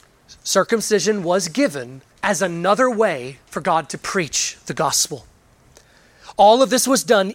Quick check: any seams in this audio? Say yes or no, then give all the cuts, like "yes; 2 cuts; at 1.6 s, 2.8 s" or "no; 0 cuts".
yes; 2 cuts; at 2.1 s, 3.4 s